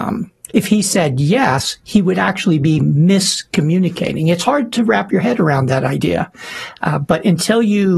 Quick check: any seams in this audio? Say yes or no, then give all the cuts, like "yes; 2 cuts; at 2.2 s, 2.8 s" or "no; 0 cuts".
no; 0 cuts